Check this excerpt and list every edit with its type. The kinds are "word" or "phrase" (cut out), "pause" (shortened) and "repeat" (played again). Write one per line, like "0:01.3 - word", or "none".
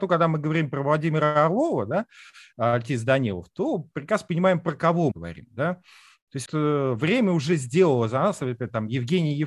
0:05.1 - word
0:06.5 - word